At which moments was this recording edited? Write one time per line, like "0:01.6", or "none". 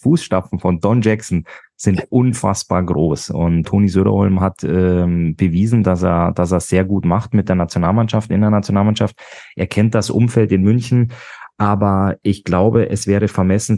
0:03.6